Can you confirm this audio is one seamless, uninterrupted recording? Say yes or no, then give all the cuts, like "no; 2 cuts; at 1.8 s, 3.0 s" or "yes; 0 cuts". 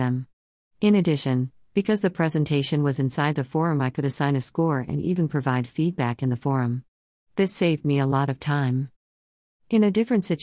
yes; 0 cuts